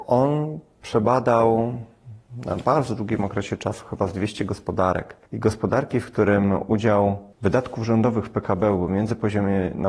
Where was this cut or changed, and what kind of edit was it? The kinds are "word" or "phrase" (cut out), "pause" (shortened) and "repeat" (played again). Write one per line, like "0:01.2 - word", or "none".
0:05.2 - pause
0:07.3 - pause